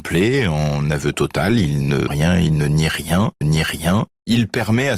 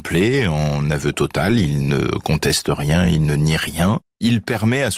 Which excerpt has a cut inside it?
first; 2 cuts; at 2.1 s, 3.4 s

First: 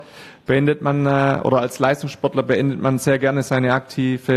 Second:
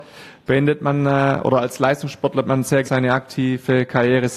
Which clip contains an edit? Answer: second; 2 cuts; at 2.4 s, 2.8 s

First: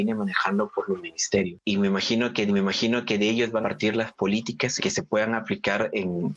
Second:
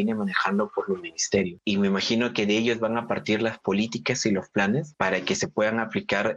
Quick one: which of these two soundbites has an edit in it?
first; 3 cuts; at 2.5 s, 3.6 s, 4.8 s

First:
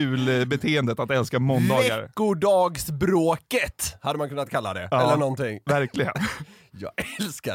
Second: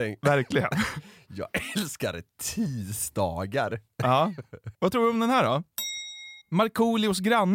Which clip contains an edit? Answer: second; 2 cuts; at 4.7 s, 6.4 s

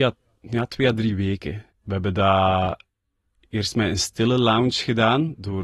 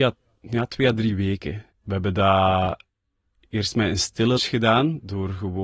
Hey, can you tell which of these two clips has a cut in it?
second; 1 cut; at 4.4 s

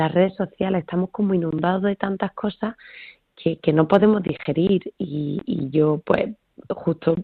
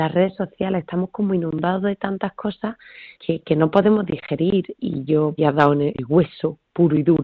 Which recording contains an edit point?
second; 4 cuts; at 3.2 s, 4.8 s, 5.4 s, 5.9 s

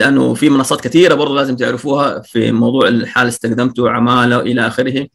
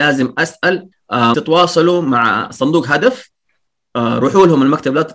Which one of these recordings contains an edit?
second; 2 cuts; at 0.9 s, 1.3 s

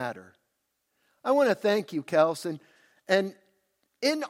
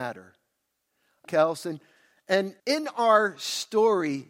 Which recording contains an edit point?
second; 2 cuts; at 1.2 s, 2.6 s

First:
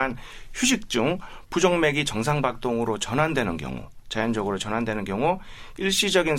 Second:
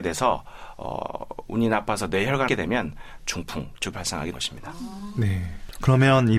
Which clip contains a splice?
second; 3 cuts; at 2.5 s, 3.9 s, 4.3 s

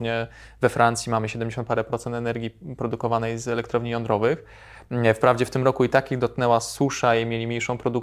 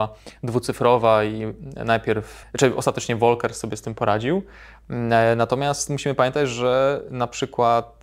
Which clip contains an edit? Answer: second; 1 cut; at 2.4 s

